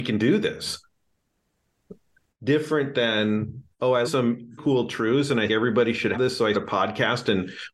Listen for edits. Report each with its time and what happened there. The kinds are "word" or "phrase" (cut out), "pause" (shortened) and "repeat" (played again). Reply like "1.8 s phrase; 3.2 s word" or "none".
2.1 s pause; 3.7 s pause; 4.0 s word; 4.6 s word; 5.5 s word; 6.1 s word; 6.5 s word